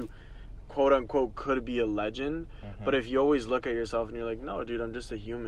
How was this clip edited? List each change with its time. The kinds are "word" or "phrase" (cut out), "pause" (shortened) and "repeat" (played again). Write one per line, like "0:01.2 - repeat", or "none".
none